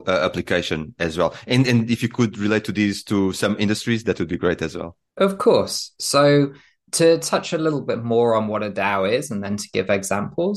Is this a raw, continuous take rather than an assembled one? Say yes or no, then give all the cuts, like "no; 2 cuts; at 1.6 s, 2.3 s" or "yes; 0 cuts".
yes; 0 cuts